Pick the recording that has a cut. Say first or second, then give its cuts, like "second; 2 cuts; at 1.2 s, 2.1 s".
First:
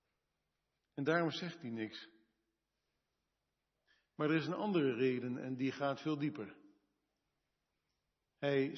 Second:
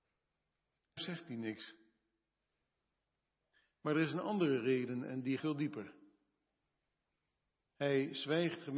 second; 2 cuts; at 1.0 s, 5.4 s